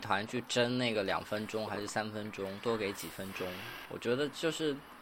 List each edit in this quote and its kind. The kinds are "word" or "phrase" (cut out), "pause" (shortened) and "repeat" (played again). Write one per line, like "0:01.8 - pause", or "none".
0:03.8 - pause